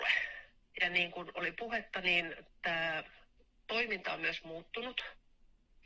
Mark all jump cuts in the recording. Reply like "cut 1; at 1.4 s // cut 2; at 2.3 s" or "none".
none